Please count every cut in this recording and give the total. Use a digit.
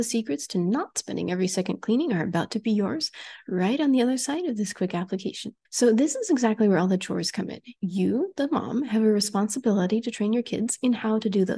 1